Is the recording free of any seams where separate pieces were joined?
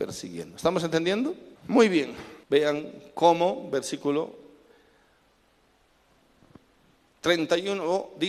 no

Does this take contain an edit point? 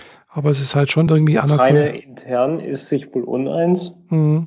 no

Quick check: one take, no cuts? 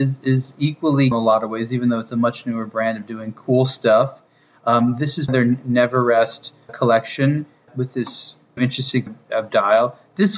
no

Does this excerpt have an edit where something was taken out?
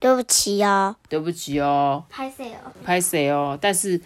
yes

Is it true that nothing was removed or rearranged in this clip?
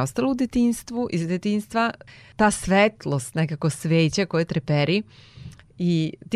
yes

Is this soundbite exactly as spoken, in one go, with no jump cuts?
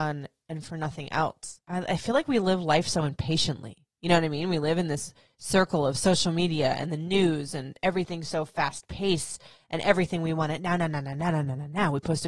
no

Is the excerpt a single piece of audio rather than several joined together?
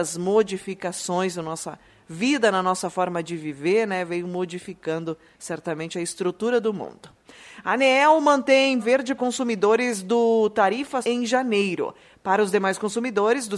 no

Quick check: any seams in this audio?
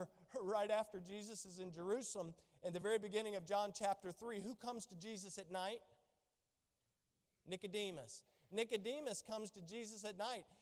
no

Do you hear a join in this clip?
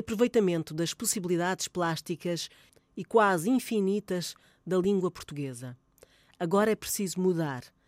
no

